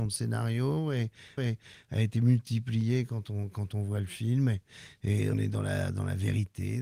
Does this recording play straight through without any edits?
no; 2 cuts; at 1.4 s, 5.3 s

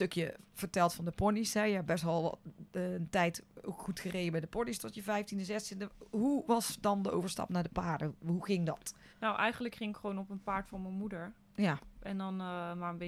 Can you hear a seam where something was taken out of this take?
yes; 1 cut; at 9.1 s

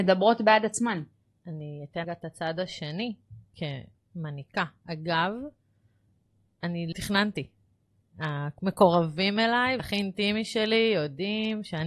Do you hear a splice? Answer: yes; 4 cuts; at 1.2 s, 2.0 s, 6.9 s, 9.8 s

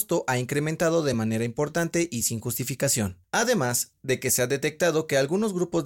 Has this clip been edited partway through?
no; 0 cuts

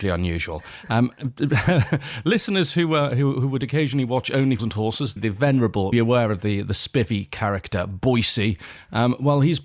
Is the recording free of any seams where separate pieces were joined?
no; 3 cuts; at 4.6 s, 5.2 s, 5.9 s

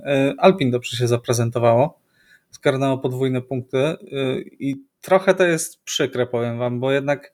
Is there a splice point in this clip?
no; 0 cuts

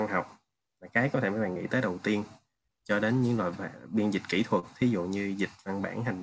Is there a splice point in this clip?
no; 0 cuts

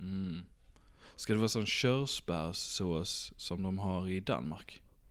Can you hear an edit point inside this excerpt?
no; 0 cuts

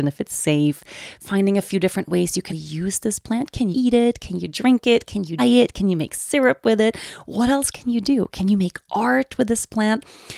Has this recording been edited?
yes; 3 cuts; at 2.5 s, 3.7 s, 5.4 s

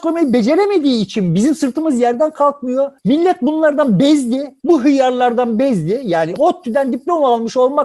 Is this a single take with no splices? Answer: no; 2 cuts; at 3.0 s, 4.6 s

